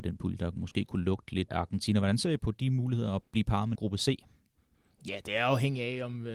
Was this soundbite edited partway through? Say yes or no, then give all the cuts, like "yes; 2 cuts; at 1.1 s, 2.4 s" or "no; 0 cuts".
yes; 4 cuts; at 1.5 s, 2.4 s, 3.2 s, 3.7 s